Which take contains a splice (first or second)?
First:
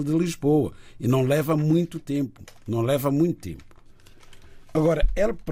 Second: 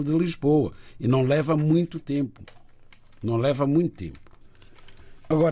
first